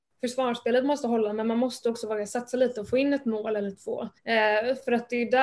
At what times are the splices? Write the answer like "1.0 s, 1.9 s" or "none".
4.2 s